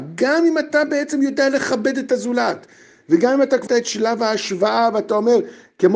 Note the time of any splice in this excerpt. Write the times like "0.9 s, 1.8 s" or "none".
3.7 s

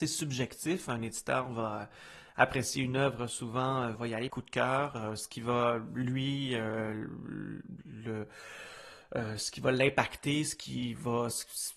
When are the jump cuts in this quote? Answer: 3.9 s, 4.3 s

